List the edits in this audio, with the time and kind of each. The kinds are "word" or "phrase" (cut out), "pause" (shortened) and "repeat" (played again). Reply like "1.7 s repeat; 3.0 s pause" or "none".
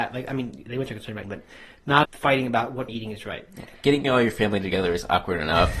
1.2 s word; 2.0 s word; 2.9 s word; 4.0 s word